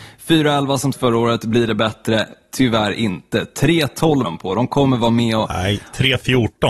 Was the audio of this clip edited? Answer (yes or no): yes